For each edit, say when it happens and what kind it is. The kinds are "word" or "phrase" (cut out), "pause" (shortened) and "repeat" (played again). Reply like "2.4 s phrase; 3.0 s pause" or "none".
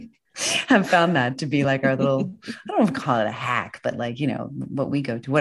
none